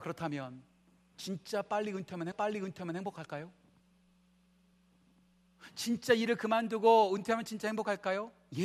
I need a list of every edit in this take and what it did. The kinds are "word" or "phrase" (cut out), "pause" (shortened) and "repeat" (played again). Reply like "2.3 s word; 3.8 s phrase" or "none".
2.3 s repeat